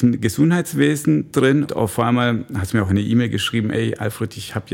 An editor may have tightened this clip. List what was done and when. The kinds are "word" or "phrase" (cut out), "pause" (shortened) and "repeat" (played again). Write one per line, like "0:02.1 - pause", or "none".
0:01.7 - word